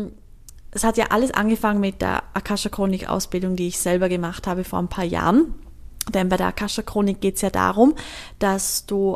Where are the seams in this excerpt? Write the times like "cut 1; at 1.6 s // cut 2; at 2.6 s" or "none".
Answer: none